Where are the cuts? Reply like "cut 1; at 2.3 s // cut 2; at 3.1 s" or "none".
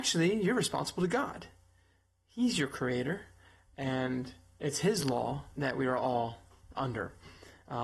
cut 1; at 6.7 s